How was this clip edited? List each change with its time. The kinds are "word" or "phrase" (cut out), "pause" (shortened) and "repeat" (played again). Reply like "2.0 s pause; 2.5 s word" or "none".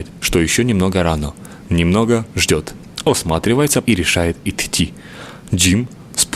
3.9 s word